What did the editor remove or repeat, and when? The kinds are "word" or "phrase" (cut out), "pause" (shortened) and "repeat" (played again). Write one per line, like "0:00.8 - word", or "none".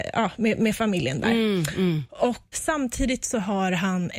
0:02.5 - word

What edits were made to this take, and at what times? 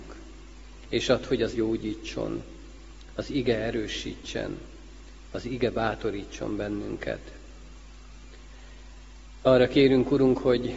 0:01.5 - word

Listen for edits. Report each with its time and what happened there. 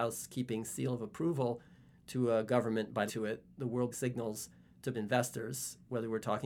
0:03.1 - word
0:03.9 - word
0:04.9 - word

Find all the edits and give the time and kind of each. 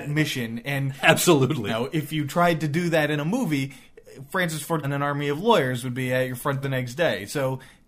0:01.7 - word
0:04.8 - word
0:06.6 - word

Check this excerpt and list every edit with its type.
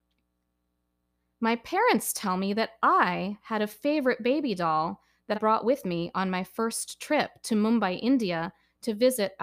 0:05.3 - word

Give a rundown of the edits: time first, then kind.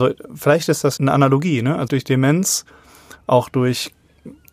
0:01.0 - word
0:01.9 - word

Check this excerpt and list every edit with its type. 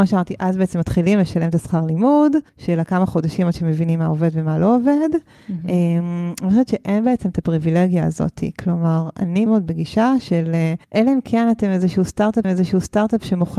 0:02.5 - pause
0:09.5 - word
0:10.8 - pause
0:12.4 - repeat

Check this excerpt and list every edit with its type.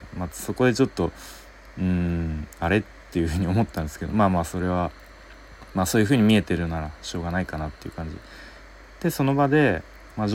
none

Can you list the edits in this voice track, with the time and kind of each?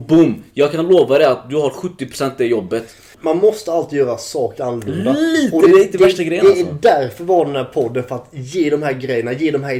0:04.6 - word

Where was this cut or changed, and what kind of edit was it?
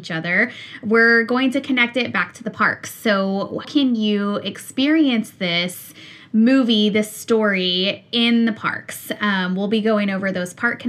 0:03.6 - word

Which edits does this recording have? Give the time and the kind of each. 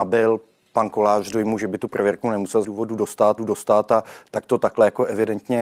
0:02.6 - word
0:03.4 - repeat

